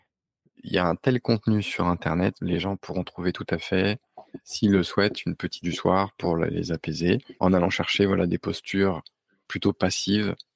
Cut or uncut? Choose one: cut